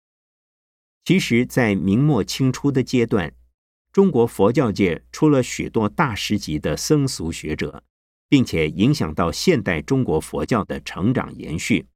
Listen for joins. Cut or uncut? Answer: uncut